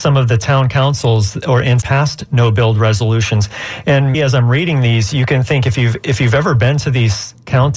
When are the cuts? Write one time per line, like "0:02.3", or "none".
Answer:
0:01.8
0:04.1